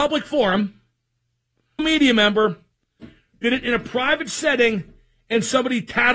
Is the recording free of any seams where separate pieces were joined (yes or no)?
no